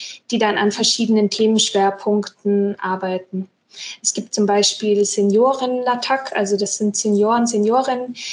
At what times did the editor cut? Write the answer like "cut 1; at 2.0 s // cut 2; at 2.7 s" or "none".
none